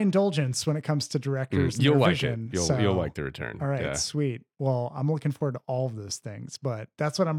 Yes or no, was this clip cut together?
no